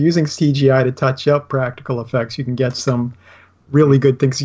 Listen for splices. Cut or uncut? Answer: uncut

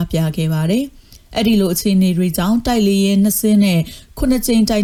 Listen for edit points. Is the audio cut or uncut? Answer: uncut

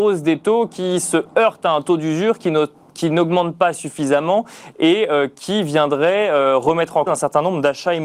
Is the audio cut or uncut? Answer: cut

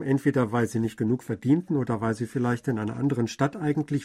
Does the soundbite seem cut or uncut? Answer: uncut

